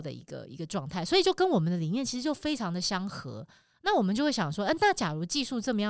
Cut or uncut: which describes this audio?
uncut